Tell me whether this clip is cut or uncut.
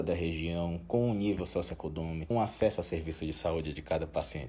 cut